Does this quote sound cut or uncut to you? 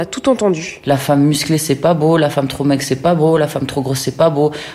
uncut